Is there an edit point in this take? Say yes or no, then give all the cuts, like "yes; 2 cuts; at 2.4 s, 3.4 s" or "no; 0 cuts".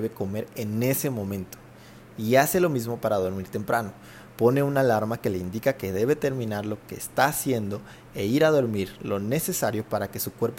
no; 0 cuts